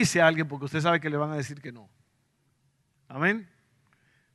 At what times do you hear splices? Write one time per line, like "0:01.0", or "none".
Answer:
none